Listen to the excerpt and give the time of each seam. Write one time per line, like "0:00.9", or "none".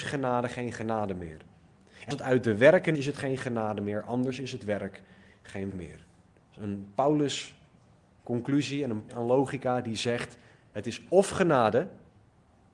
0:02.1
0:02.9
0:05.7
0:09.1